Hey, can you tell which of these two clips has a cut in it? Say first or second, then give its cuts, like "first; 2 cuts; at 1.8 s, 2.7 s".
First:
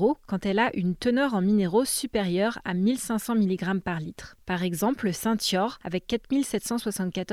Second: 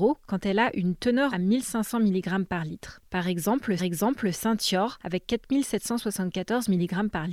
second; 2 cuts; at 1.3 s, 3.8 s